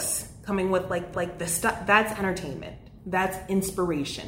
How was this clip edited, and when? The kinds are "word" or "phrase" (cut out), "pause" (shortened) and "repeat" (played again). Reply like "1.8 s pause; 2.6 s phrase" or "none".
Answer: 1.1 s repeat